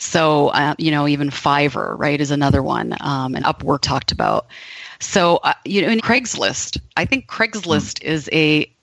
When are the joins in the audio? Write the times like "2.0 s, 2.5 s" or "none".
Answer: 3.4 s, 3.8 s, 6.0 s